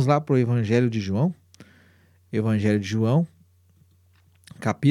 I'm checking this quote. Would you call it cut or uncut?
uncut